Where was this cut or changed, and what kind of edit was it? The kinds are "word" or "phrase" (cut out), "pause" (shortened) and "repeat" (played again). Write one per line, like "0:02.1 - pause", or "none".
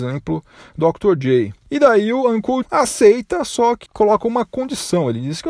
0:02.6 - word
0:03.9 - word